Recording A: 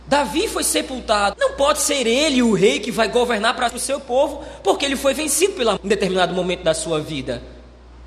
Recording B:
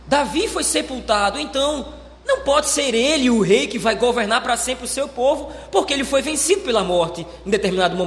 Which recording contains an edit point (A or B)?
A